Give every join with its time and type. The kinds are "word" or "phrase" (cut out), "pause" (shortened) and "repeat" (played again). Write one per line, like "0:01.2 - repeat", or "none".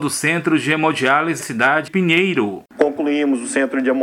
0:01.4 - word
0:01.9 - word